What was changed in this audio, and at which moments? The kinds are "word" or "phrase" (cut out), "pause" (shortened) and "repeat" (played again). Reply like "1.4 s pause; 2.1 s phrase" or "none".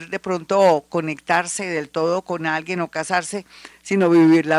none